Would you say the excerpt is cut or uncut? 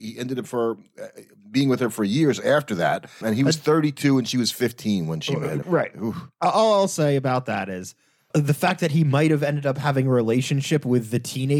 cut